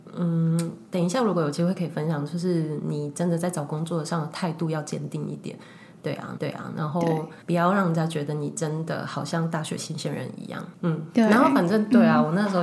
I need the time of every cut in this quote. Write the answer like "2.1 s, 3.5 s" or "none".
6.4 s, 7.4 s, 10.7 s